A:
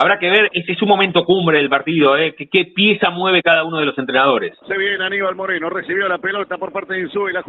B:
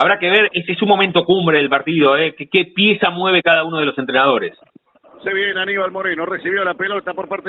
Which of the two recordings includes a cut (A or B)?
A